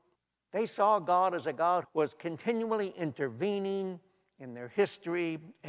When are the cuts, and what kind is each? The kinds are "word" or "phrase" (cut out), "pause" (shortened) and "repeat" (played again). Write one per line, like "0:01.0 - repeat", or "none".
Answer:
0:01.8 - word